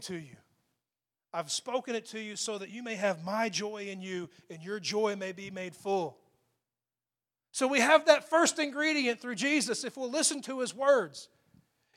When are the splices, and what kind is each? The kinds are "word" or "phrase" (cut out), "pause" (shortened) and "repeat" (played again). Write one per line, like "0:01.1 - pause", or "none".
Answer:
none